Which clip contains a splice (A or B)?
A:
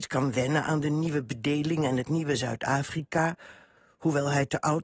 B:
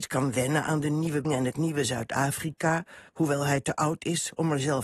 B